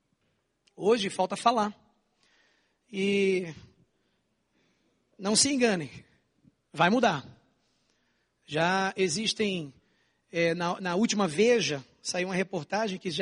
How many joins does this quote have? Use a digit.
0